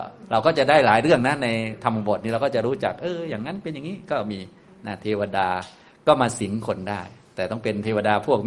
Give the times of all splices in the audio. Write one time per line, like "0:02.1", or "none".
none